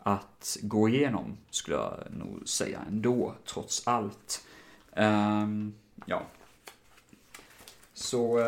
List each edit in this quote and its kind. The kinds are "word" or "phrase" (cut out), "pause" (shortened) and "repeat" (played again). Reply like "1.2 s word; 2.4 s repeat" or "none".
none